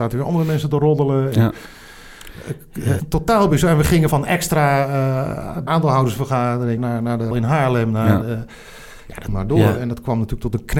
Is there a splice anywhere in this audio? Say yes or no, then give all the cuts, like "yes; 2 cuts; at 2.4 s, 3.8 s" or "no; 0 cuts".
yes; 6 cuts; at 3.0 s, 4.1 s, 5.7 s, 6.8 s, 7.3 s, 9.3 s